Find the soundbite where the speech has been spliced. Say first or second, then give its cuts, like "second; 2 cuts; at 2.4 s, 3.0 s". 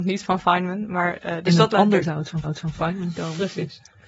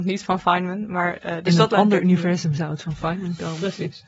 first; 2 cuts; at 2.0 s, 2.4 s